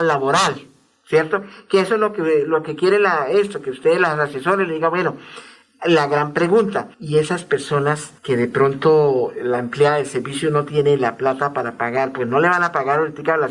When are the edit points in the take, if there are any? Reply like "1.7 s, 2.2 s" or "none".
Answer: 6.9 s, 8.2 s